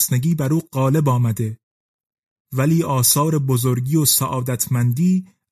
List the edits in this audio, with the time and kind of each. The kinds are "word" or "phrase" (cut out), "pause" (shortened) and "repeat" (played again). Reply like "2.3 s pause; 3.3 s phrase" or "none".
none

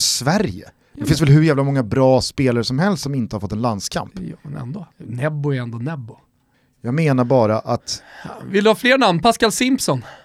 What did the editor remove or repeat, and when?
4.4 s pause; 4.9 s pause; 6.5 s pause

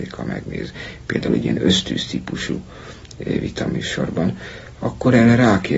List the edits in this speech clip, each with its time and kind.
none

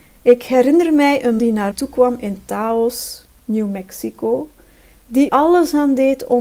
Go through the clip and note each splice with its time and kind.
1.4 s word; 1.7 s word; 5.3 s word

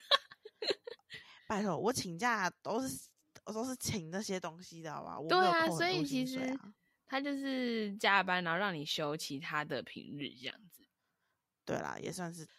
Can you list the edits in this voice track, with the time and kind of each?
1.1 s word

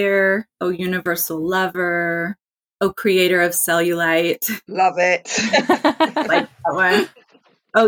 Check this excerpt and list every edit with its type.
none

